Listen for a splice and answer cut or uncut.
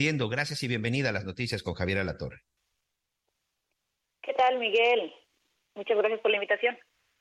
uncut